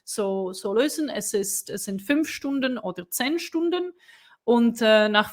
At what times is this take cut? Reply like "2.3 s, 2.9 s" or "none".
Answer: none